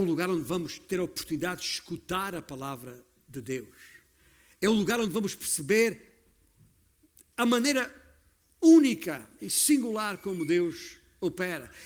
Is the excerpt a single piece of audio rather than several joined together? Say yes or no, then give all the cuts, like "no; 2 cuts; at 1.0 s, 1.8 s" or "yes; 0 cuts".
yes; 0 cuts